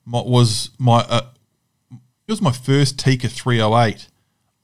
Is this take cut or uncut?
cut